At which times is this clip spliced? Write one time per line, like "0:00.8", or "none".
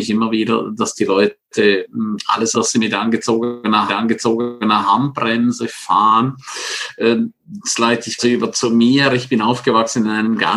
0:02.5
0:03.9
0:08.2